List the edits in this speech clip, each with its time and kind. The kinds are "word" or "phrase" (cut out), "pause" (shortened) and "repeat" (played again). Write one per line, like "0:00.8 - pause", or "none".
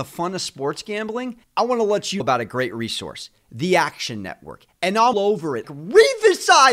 0:01.4 - pause
0:02.2 - word
0:05.1 - word
0:05.6 - word